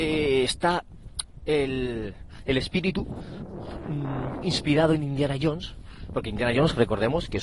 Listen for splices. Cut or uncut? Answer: cut